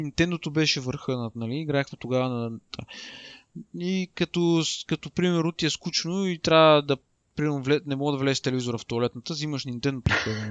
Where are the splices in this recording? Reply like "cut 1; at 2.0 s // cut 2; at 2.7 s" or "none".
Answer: none